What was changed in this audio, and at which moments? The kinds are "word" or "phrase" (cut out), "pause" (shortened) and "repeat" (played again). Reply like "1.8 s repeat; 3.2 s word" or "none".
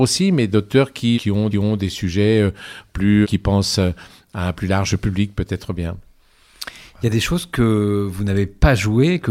1.1 s word; 1.5 s repeat; 3.2 s word